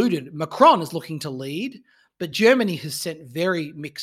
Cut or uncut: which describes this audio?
uncut